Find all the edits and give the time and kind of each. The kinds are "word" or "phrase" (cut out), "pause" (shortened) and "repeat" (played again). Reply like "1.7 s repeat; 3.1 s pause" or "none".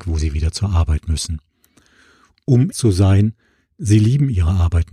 2.7 s word